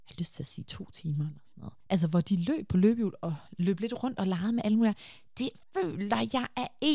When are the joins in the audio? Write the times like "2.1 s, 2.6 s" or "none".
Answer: 1.8 s, 5.6 s